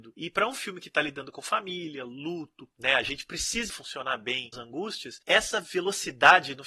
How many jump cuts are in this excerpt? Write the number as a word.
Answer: three